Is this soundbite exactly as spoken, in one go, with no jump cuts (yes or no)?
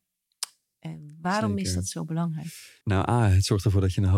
no